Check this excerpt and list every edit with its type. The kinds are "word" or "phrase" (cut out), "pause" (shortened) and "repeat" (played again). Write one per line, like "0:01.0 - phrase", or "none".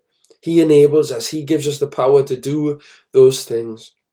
none